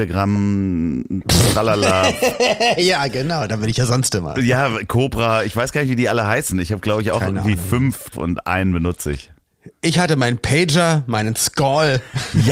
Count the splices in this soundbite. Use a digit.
1